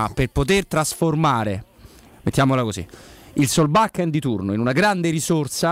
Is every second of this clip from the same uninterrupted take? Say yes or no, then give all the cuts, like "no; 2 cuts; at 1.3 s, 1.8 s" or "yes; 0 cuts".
yes; 0 cuts